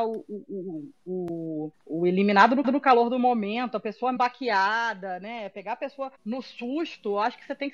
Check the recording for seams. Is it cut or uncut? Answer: cut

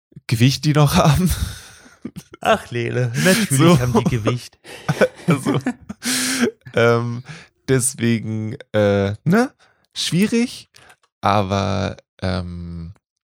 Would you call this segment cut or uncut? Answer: uncut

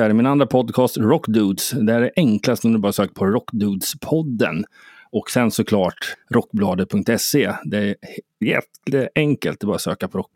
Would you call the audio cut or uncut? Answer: cut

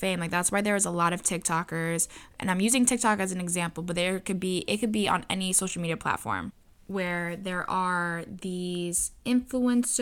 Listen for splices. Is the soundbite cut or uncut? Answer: uncut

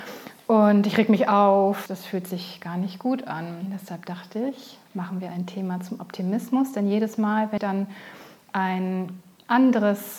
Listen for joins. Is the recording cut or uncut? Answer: cut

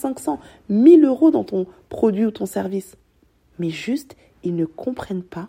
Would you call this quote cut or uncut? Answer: uncut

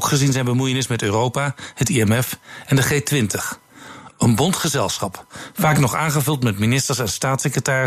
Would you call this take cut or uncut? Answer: uncut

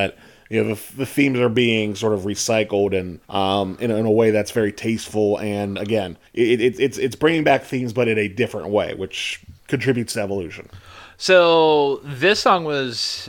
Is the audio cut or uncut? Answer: cut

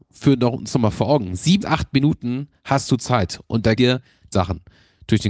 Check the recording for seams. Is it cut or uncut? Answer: cut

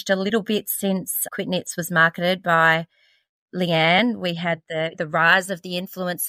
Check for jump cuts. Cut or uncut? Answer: uncut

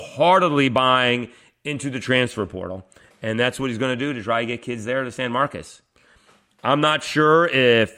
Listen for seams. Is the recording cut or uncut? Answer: uncut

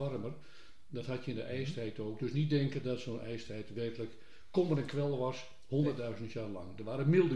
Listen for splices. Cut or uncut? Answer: uncut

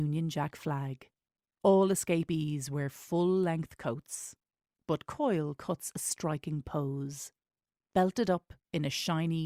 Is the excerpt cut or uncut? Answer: uncut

